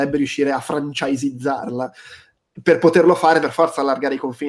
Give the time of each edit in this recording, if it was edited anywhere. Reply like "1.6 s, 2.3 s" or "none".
3.4 s